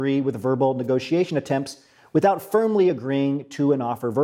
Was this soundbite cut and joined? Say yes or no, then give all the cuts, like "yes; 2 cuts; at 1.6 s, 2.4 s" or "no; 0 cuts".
no; 0 cuts